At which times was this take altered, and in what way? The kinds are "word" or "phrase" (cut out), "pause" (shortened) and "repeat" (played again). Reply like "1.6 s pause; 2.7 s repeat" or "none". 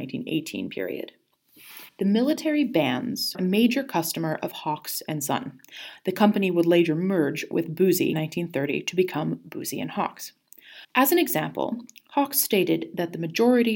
1.9 s pause; 3.3 s word; 8.1 s word; 10.8 s pause

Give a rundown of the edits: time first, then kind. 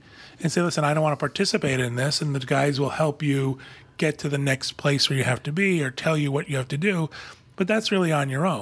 none

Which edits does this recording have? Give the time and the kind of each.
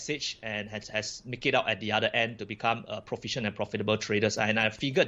none

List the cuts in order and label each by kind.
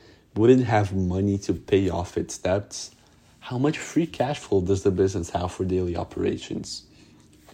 none

